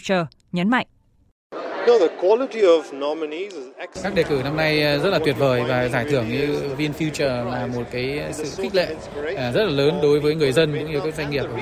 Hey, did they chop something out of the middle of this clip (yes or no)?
no